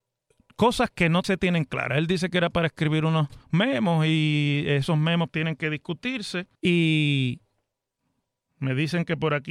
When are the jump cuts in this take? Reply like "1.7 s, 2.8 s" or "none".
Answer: 1.2 s, 3.4 s, 5.3 s, 6.5 s